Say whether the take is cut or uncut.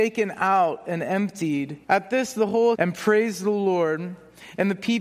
cut